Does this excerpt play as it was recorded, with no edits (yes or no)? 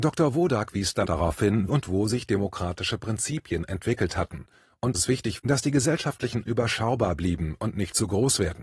no